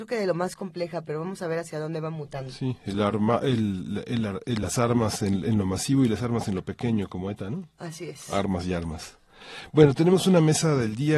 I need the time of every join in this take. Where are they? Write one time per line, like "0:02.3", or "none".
none